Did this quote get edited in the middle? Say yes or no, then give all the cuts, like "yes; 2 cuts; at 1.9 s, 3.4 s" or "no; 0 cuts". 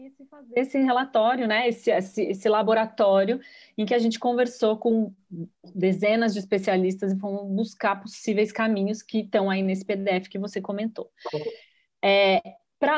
no; 0 cuts